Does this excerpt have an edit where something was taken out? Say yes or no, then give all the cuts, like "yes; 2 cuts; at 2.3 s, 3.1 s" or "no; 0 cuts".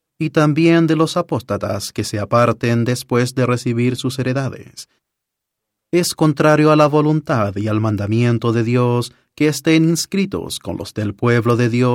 no; 0 cuts